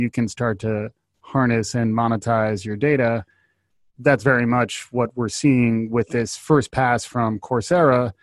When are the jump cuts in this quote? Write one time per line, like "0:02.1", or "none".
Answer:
none